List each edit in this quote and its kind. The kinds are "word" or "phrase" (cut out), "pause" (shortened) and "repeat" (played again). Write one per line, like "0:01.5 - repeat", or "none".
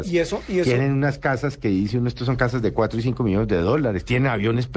none